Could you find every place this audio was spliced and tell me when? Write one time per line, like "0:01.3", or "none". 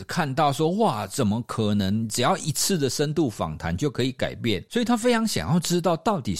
0:04.7